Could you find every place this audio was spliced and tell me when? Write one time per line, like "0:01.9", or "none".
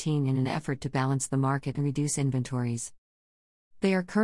0:01.7